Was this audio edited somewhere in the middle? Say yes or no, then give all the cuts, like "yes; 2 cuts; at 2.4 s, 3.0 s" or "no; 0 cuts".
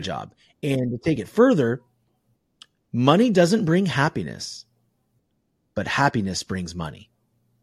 no; 0 cuts